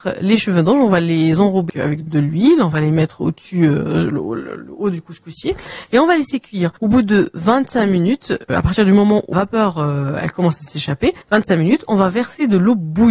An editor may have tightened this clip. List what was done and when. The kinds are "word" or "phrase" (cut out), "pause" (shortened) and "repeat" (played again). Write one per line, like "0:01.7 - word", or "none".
0:01.7 - word
0:02.1 - word
0:06.8 - pause
0:08.5 - word
0:09.3 - phrase
0:11.2 - pause